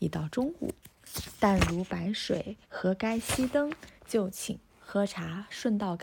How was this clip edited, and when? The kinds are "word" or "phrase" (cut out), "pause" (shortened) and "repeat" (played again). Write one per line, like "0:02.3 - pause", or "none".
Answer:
0:02.6 - pause
0:04.0 - pause
0:04.7 - pause